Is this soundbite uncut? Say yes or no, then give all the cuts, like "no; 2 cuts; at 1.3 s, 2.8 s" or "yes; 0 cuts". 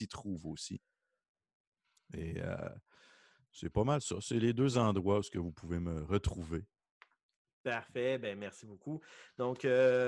yes; 0 cuts